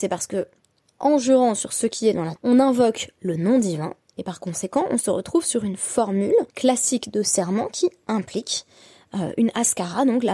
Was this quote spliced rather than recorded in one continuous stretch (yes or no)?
yes